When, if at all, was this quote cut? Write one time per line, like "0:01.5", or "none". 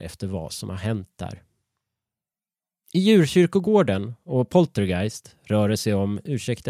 none